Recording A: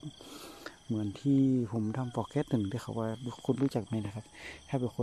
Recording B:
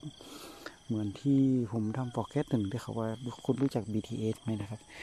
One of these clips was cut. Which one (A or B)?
A